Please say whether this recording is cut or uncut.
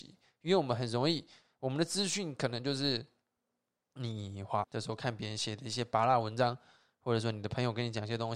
cut